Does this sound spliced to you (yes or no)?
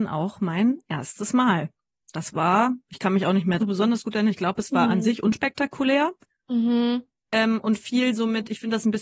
yes